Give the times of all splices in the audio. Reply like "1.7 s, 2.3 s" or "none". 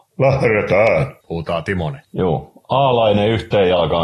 1.2 s, 2.0 s